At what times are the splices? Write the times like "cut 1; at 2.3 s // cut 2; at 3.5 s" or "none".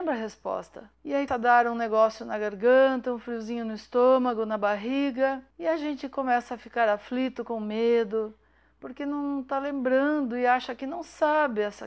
cut 1; at 0.9 s // cut 2; at 1.3 s // cut 3; at 5.5 s